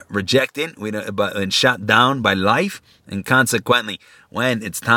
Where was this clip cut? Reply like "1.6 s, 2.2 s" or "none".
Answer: none